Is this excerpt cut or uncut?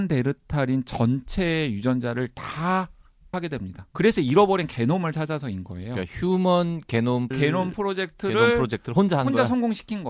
cut